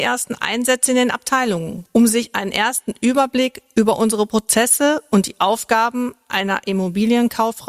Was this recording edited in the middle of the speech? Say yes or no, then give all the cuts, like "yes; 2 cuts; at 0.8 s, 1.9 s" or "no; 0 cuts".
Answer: no; 0 cuts